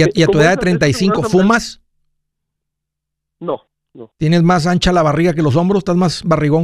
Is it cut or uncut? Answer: uncut